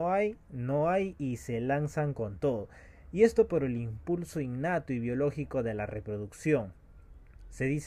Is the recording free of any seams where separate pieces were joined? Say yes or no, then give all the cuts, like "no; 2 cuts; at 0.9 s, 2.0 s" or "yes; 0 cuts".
no; 1 cut; at 3.5 s